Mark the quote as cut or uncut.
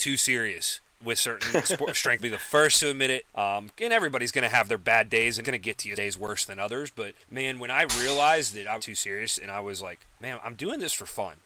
cut